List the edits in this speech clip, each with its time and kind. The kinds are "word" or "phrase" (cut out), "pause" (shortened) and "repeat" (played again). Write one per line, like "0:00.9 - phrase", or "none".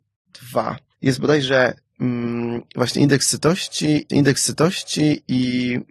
0:00.9 - pause
0:04.1 - repeat